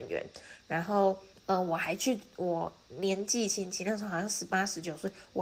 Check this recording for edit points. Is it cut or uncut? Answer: cut